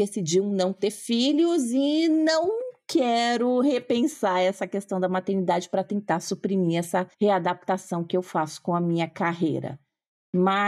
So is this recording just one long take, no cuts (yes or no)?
no